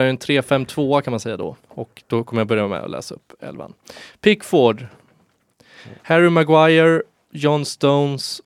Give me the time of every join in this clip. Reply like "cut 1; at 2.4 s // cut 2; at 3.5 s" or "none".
cut 1; at 1.6 s // cut 2; at 6.0 s

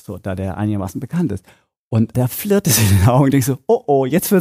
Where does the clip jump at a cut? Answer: cut 1; at 2.1 s

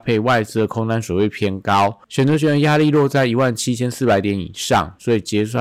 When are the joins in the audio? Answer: cut 1; at 2.0 s

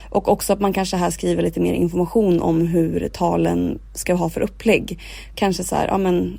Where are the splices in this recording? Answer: none

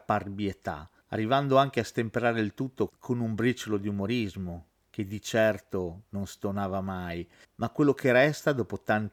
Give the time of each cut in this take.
none

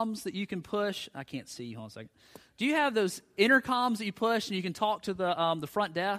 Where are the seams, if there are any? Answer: none

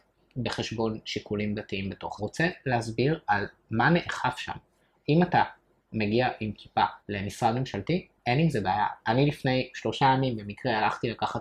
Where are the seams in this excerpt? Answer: cut 1; at 2.2 s // cut 2; at 7.0 s

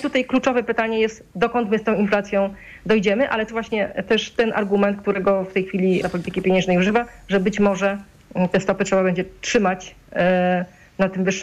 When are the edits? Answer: cut 1; at 3.5 s // cut 2; at 6.0 s

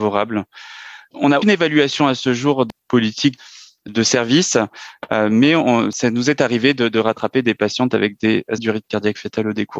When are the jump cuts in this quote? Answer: cut 1; at 1.4 s // cut 2; at 2.7 s // cut 3; at 3.9 s // cut 4; at 8.6 s

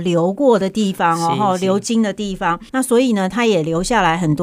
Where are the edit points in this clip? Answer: cut 1; at 2.7 s

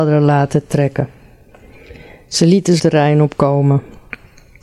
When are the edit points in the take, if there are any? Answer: cut 1; at 2.8 s

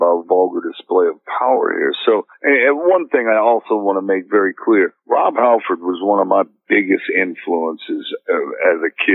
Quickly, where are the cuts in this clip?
cut 1; at 2.3 s // cut 2; at 5.0 s

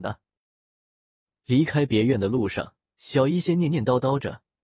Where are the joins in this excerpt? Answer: cut 1; at 2.9 s

